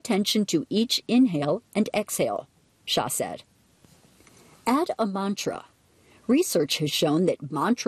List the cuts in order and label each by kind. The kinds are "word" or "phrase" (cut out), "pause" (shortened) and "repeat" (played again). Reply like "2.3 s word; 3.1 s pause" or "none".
none